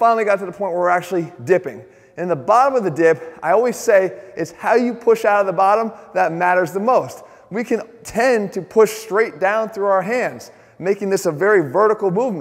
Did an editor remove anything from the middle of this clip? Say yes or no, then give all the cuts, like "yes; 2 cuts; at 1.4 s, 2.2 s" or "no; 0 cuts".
no; 0 cuts